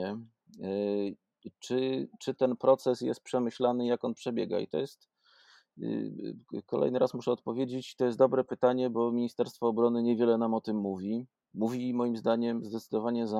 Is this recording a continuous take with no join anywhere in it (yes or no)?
yes